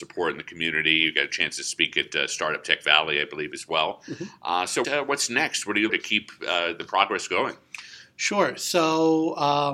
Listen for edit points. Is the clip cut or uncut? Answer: cut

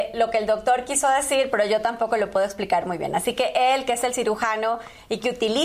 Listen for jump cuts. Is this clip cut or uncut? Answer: uncut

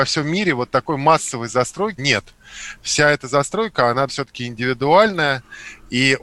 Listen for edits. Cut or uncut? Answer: cut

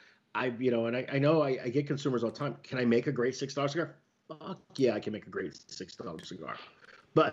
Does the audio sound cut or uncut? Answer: uncut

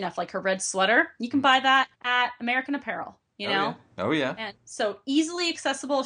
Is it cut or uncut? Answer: cut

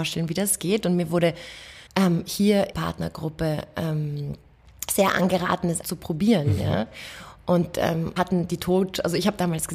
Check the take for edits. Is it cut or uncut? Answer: cut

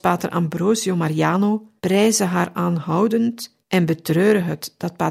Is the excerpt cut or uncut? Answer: cut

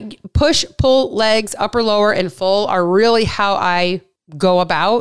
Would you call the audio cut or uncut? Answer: uncut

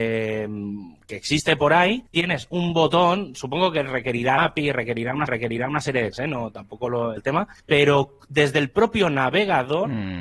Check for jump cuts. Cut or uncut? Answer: cut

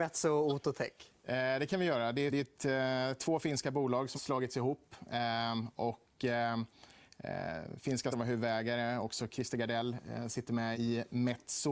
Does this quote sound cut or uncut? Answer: cut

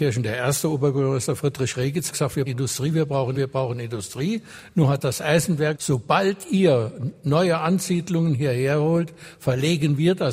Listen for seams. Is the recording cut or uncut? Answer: cut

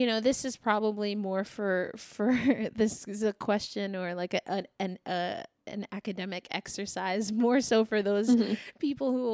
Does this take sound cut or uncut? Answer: uncut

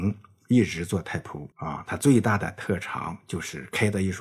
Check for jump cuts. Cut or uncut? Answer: cut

